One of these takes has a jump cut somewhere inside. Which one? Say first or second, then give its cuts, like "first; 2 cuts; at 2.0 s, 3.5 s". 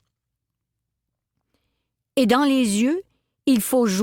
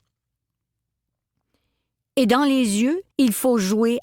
second; 1 cut; at 3.1 s